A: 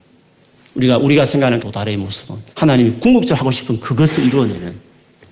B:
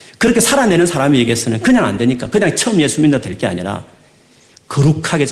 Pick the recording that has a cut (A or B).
A